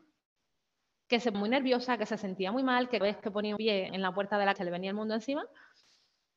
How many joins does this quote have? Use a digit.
5